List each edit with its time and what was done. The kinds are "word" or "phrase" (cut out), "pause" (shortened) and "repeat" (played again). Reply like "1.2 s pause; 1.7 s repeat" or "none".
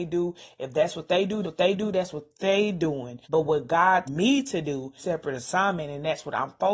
1.4 s repeat; 3.2 s pause; 4.1 s word; 5.0 s phrase